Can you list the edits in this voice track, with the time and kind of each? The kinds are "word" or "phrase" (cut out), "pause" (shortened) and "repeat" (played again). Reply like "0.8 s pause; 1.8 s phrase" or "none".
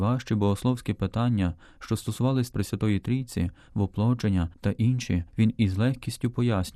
2.5 s word; 4.5 s pause; 5.3 s pause